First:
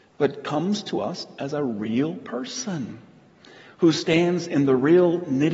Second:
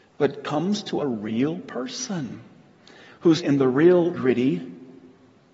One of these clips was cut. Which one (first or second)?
second